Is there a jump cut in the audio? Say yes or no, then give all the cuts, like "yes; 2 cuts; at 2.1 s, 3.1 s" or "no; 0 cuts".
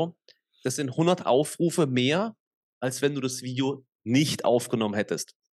no; 0 cuts